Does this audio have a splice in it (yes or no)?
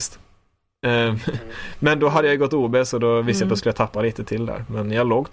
no